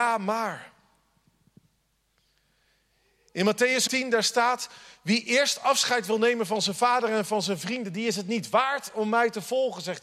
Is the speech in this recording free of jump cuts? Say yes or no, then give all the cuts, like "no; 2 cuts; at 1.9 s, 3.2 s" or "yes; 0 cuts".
no; 1 cut; at 3.9 s